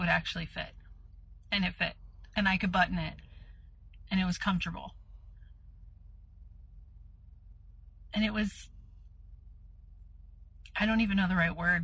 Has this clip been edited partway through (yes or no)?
no